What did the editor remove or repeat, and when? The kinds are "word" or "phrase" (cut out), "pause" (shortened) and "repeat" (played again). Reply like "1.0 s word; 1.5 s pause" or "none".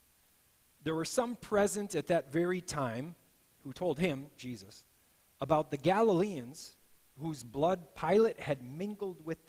none